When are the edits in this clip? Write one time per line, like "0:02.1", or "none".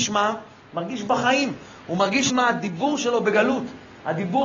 0:02.3